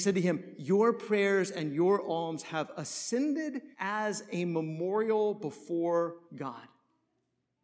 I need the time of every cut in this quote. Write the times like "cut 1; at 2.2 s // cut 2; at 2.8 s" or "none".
cut 1; at 3.7 s // cut 2; at 6.2 s